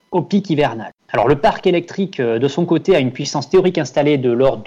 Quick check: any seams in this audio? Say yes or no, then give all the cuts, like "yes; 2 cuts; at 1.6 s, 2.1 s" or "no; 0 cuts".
yes; 1 cut; at 1.0 s